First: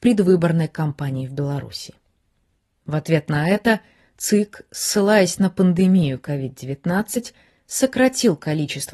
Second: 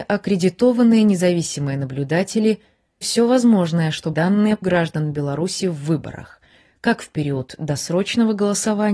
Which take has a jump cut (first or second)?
second